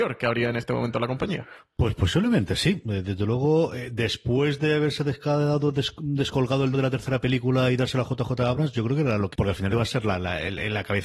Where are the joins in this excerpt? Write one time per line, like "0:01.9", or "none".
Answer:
0:06.7
0:09.3
0:09.7